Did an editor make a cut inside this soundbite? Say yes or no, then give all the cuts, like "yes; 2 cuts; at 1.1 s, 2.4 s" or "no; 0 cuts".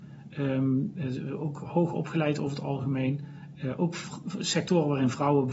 no; 0 cuts